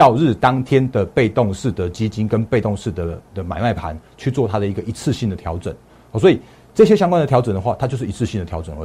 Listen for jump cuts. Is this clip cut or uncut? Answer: uncut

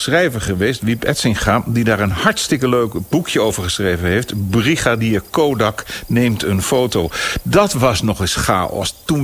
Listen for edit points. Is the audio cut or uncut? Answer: uncut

